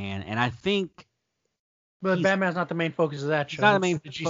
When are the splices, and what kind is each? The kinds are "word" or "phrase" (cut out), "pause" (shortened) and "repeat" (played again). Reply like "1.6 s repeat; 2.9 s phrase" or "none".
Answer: none

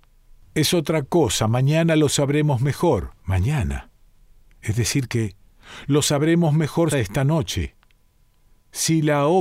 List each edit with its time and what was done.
3.2 s pause; 6.9 s phrase

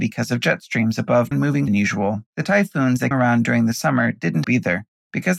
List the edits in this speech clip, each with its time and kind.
1.3 s word; 1.7 s phrase; 2.3 s pause; 3.1 s word; 4.4 s word

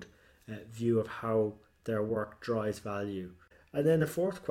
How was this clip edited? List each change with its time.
none

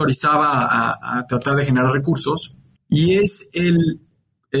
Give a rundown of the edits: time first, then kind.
2.8 s pause

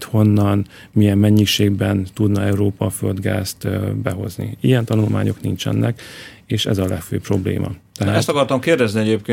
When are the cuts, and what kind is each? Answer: none

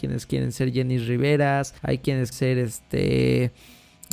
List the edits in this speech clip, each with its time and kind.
1.8 s pause; 2.3 s word

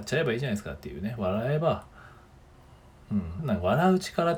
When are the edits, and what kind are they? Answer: 3.4 s word

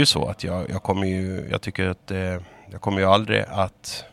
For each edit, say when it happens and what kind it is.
none

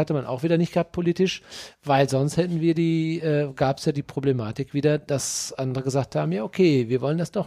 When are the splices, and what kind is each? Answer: none

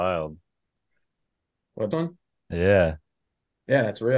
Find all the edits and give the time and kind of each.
1.9 s word

